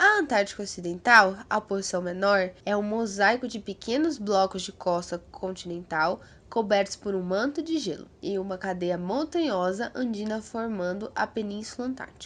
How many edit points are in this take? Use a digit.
1